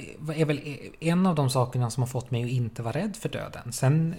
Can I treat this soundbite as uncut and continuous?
yes; 0 cuts

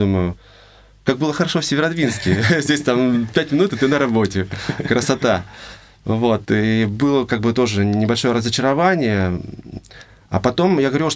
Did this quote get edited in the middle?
no; 0 cuts

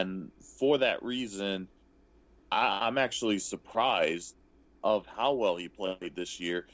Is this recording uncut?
yes; 0 cuts

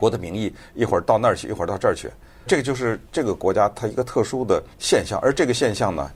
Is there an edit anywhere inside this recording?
yes; 3 cuts; at 2.5 s, 3.1 s, 4.7 s

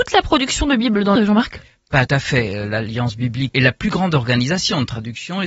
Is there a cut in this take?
yes; 3 cuts; at 1.2 s, 2.1 s, 3.5 s

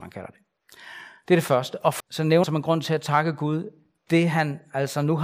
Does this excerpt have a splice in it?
yes; 2 cuts; at 2.0 s, 2.4 s

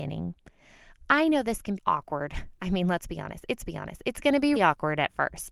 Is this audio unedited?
no; 3 cuts; at 1.8 s, 3.6 s, 4.6 s

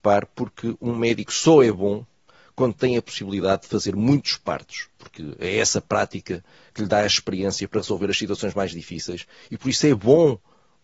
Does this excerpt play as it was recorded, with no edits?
yes; 0 cuts

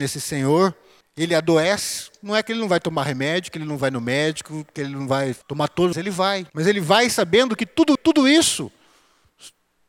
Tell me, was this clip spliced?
yes; 5 cuts; at 1.0 s, 5.4 s, 5.9 s, 6.5 s, 7.9 s

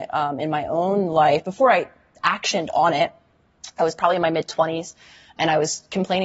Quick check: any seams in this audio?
no; 0 cuts

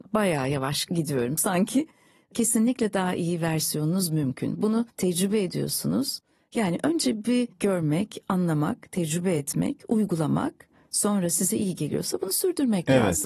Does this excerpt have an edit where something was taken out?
no; 0 cuts

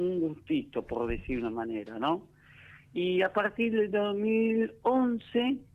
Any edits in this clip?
no; 0 cuts

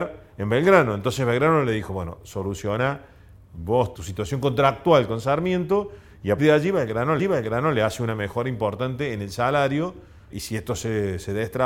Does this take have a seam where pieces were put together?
yes; 4 cuts; at 3.9 s, 6.4 s, 7.2 s, 10.3 s

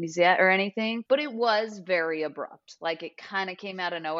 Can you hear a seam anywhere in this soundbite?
no; 0 cuts

